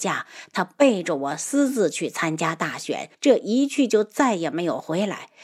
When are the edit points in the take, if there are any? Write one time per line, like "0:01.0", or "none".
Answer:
0:03.1